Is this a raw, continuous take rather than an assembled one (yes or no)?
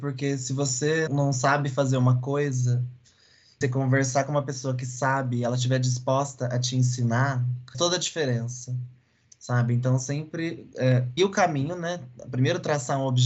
no